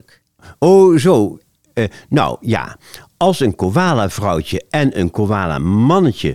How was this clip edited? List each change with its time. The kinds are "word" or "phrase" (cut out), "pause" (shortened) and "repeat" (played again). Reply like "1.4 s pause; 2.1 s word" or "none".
none